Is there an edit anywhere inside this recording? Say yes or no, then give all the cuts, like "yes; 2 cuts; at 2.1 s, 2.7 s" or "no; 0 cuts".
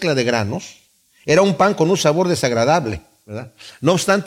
no; 0 cuts